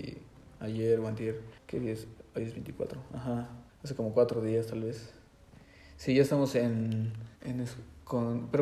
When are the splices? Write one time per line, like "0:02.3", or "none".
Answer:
0:01.6
0:03.7
0:07.4